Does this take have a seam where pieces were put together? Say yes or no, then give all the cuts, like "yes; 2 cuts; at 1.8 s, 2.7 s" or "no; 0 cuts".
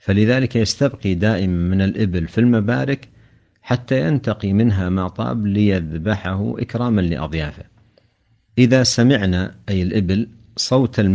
no; 0 cuts